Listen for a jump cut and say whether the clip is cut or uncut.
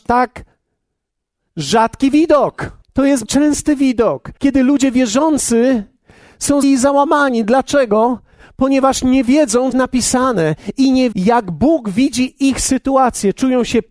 cut